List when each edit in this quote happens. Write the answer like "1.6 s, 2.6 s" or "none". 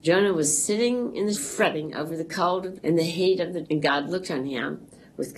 1.3 s, 2.7 s, 3.6 s